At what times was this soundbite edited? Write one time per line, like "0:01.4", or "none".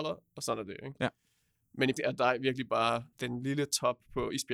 0:02.0
0:03.1